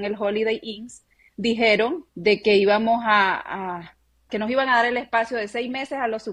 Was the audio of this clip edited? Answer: yes; 2 cuts; at 2.1 s, 4.3 s

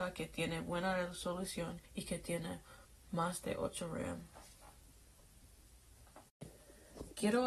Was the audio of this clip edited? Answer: yes; 2 cuts; at 1.8 s, 2.8 s

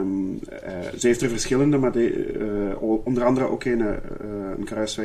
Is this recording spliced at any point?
no; 0 cuts

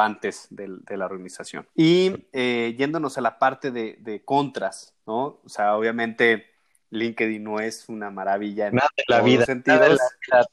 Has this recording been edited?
yes; 2 cuts; at 1.7 s, 5.0 s

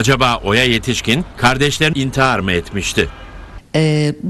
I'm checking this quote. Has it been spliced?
yes; 1 cut; at 1.9 s

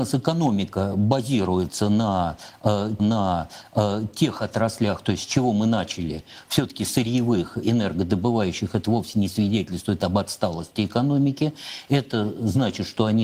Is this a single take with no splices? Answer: no; 2 cuts; at 3.0 s, 7.6 s

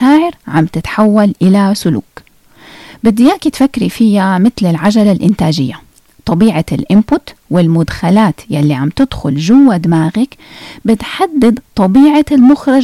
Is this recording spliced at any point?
no; 0 cuts

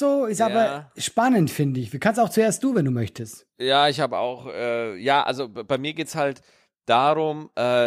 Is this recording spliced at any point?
no; 0 cuts

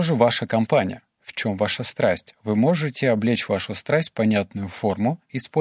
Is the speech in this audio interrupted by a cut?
no; 0 cuts

